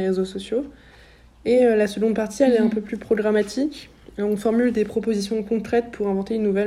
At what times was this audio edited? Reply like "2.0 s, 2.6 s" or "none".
none